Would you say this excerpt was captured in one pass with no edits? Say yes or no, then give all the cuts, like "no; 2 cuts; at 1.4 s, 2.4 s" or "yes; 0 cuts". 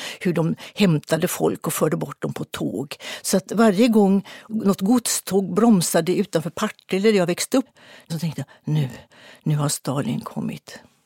yes; 0 cuts